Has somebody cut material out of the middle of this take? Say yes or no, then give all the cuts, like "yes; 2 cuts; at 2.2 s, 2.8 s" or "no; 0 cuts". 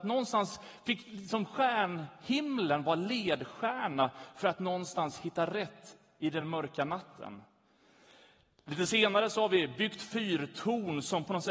no; 0 cuts